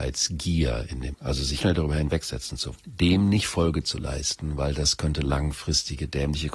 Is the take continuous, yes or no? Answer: no